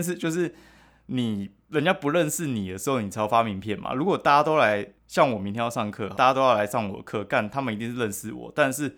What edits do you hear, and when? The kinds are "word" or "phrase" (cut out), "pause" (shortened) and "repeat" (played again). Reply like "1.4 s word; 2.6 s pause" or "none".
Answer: 5.0 s pause; 6.1 s word